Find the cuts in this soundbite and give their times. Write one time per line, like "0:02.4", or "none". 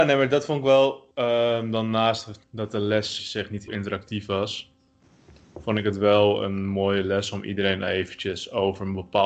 0:01.1
0:02.4
0:03.2
0:03.7